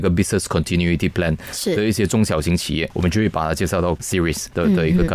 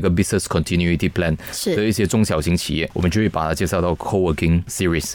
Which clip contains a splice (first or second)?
first